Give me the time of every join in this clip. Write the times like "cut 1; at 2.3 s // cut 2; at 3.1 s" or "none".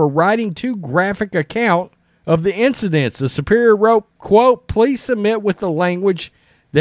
cut 1; at 2.1 s // cut 2; at 4.1 s